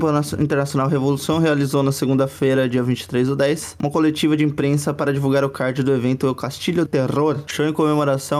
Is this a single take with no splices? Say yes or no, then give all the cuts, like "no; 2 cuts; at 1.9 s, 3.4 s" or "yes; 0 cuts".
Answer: no; 1 cut; at 6.9 s